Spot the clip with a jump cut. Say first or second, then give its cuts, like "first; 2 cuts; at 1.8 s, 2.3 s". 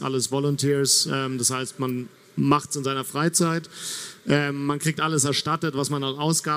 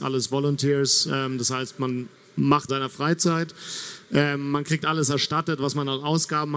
second; 1 cut; at 2.7 s